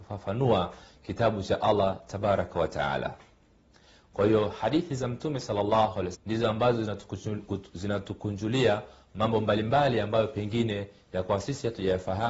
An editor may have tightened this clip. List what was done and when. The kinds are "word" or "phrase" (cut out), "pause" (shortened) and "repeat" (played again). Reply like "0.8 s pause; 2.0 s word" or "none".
6.1 s word